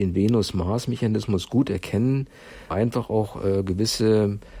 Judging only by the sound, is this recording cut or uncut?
cut